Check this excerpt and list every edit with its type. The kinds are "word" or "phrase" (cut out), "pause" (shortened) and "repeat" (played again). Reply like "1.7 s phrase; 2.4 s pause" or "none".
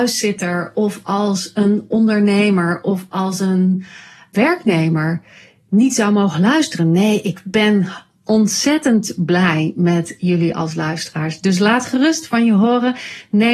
none